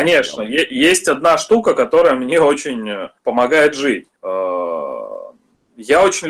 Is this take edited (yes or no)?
yes